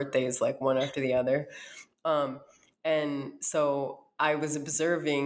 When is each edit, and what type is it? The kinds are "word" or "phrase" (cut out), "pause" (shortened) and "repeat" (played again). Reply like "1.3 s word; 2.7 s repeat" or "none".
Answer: none

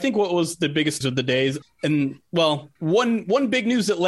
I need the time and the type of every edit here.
1.0 s word; 1.6 s word; 2.8 s pause

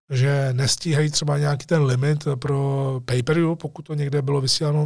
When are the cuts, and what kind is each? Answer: none

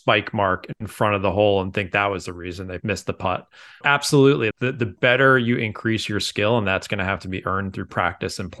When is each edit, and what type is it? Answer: 3.8 s word; 4.5 s word

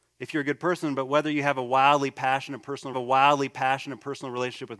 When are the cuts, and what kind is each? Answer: 2.9 s repeat

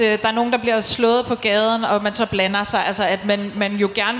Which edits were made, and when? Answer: none

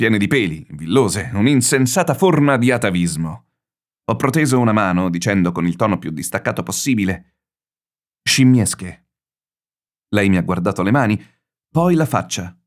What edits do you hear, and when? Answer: none

